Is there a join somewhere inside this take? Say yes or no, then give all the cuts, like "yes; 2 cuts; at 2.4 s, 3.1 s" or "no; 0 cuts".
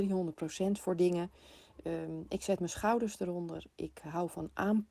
no; 0 cuts